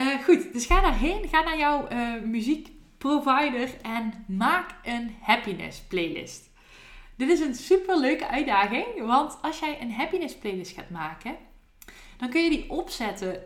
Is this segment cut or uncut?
uncut